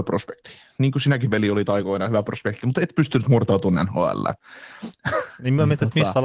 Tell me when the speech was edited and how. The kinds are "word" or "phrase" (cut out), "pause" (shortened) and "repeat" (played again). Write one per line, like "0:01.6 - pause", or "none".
none